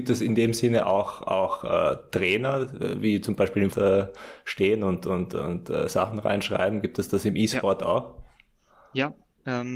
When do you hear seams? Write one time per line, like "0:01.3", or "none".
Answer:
0:03.7